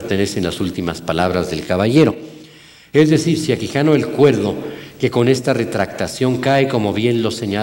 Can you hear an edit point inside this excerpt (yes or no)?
no